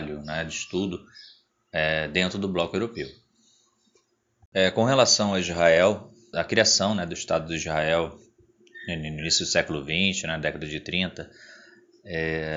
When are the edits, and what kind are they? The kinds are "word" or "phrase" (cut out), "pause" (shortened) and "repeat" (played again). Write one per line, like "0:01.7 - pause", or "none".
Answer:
0:06.3 - word